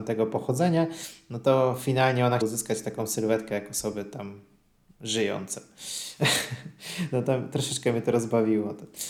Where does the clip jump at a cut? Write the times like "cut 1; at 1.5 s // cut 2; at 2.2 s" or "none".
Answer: cut 1; at 2.4 s